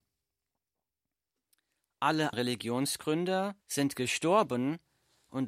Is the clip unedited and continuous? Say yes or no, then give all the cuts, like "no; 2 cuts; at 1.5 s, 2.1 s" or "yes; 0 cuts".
no; 2 cuts; at 2.3 s, 3.6 s